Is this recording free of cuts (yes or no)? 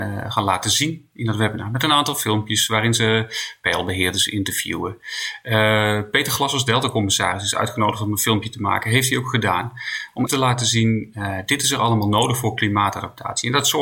no